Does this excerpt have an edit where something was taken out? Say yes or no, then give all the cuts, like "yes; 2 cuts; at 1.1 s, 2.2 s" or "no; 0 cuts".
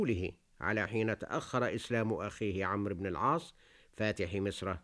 no; 0 cuts